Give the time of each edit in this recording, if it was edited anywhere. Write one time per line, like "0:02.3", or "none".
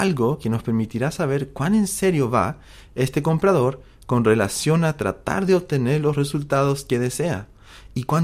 none